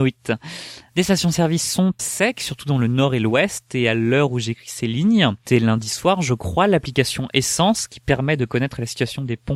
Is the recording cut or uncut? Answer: cut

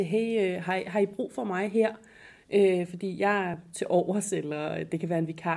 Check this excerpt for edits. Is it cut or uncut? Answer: uncut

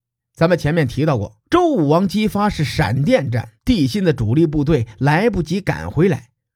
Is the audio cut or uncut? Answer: cut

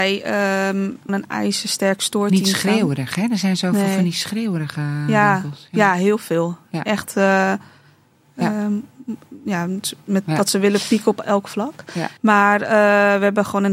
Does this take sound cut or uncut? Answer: cut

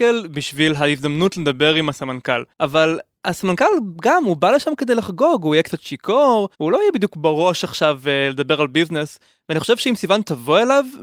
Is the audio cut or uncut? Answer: cut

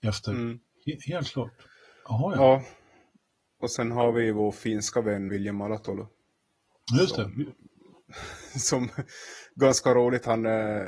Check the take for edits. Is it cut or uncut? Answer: cut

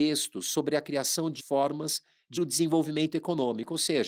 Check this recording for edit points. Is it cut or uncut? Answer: cut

